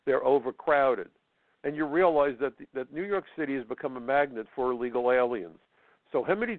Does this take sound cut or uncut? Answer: uncut